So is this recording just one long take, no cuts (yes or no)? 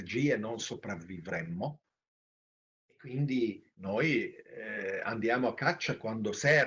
no